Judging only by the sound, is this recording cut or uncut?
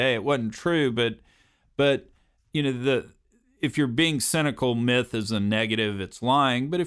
uncut